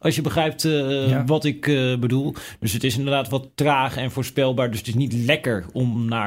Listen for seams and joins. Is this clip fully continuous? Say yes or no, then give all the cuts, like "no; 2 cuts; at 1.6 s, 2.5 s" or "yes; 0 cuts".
yes; 0 cuts